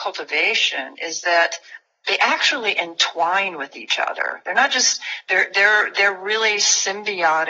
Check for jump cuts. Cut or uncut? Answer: uncut